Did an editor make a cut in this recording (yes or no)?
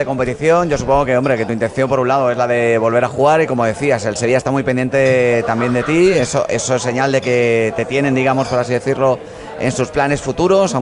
no